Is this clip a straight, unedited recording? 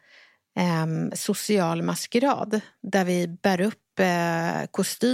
yes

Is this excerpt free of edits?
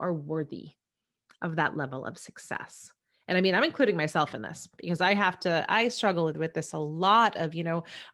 yes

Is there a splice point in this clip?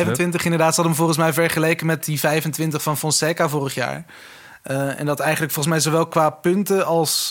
no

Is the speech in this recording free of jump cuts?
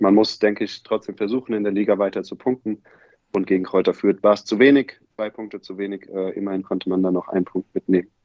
yes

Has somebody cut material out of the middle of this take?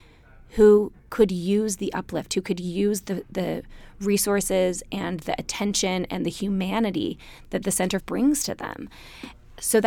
yes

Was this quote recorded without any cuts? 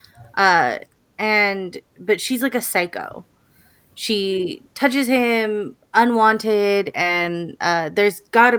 yes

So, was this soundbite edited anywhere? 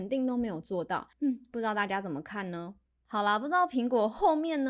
yes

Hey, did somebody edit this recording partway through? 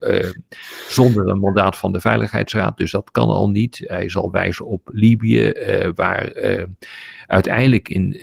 no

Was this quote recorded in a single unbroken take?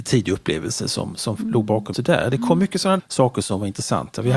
no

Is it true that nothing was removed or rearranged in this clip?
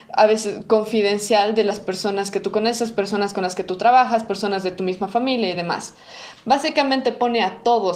yes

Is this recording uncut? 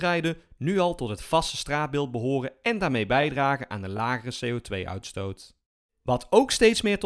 no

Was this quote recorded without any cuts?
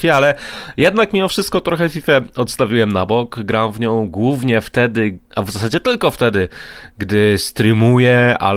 no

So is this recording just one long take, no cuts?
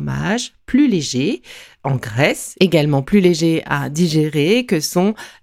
yes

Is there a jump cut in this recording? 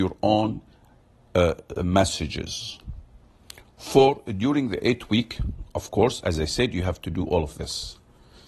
no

